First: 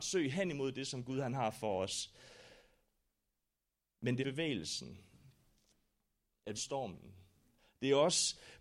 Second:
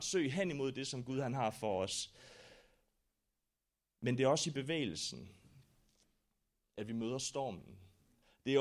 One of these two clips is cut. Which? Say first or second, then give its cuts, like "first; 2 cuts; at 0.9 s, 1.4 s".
first; 2 cuts; at 4.2 s, 6.5 s